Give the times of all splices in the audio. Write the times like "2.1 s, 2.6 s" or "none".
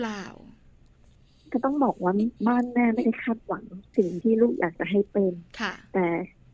2.4 s, 5.5 s